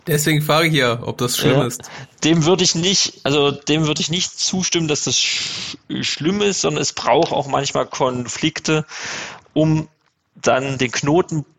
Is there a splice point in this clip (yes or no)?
no